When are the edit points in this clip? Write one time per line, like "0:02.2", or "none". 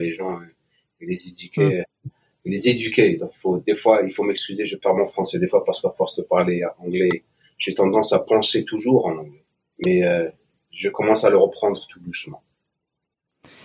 none